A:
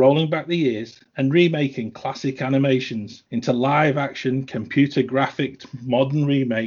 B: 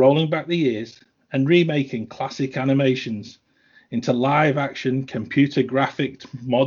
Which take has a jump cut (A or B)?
A